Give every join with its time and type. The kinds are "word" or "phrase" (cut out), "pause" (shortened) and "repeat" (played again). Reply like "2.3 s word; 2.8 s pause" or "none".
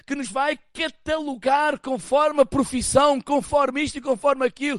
2.3 s phrase